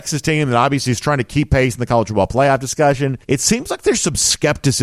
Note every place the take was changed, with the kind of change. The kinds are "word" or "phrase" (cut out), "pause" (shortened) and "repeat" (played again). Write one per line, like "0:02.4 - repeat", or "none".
0:03.2 - pause